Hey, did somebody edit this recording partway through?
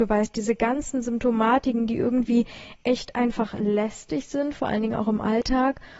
no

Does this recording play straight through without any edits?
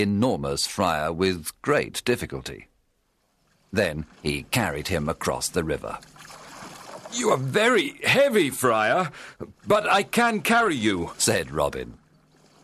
no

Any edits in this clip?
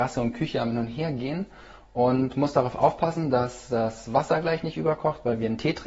no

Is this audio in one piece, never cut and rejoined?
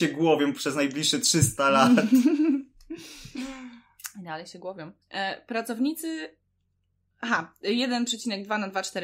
no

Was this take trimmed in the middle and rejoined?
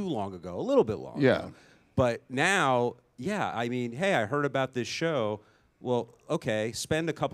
no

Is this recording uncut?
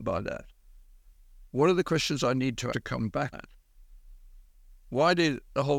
no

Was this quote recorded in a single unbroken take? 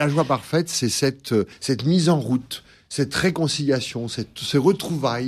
yes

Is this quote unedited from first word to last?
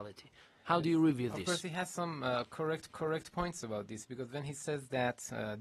no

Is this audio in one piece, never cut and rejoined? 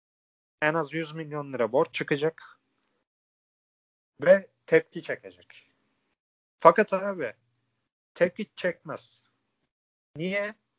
yes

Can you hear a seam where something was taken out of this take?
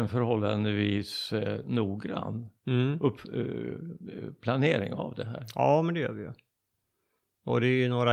no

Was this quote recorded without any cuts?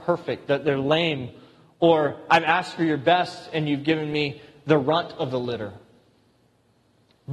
yes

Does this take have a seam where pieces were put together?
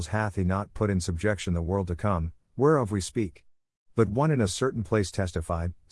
no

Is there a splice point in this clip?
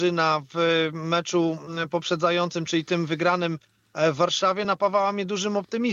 no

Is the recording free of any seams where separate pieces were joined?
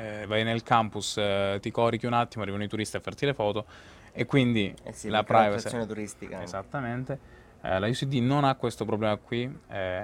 yes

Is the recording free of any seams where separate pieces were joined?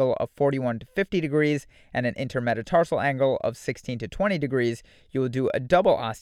yes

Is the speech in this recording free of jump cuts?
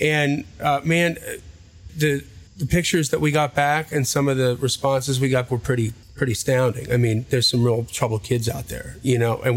no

